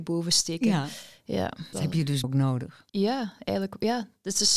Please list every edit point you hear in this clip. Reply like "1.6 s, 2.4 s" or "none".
1.7 s, 2.2 s, 2.9 s